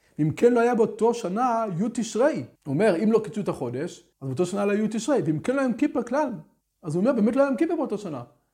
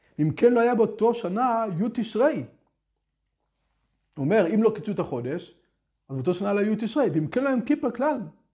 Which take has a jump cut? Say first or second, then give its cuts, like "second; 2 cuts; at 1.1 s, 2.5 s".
first; 3 cuts; at 2.6 s, 4.1 s, 6.6 s